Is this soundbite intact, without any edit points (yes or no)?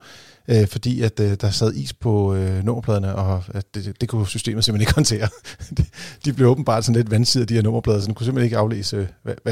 yes